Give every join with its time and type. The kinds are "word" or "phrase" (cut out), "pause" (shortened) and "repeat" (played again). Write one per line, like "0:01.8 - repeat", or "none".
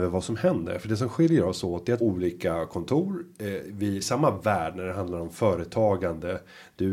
0:02.0 - phrase
0:04.0 - phrase